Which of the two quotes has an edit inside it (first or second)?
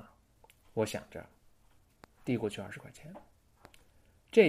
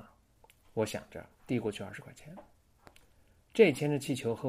second